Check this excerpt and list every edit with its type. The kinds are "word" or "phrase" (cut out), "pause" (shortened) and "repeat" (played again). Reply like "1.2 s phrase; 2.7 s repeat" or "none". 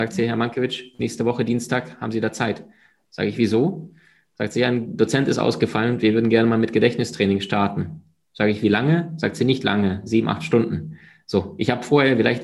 none